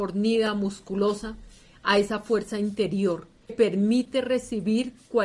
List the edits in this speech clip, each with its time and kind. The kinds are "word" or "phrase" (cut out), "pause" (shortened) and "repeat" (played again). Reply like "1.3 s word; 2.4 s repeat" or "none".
3.5 s word